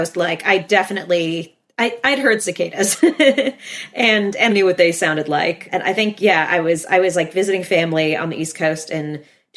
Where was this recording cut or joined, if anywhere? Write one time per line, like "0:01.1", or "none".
0:04.5